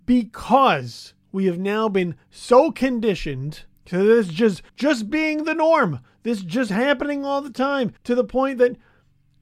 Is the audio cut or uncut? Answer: cut